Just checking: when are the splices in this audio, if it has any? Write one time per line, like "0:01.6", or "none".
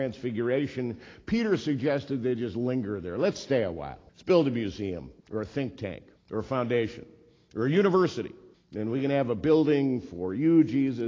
0:04.1
0:05.2
0:06.2
0:08.5